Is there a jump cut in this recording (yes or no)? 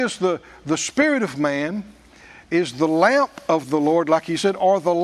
no